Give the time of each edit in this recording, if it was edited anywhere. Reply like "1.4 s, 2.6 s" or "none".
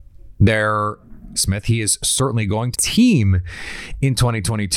1.3 s, 2.7 s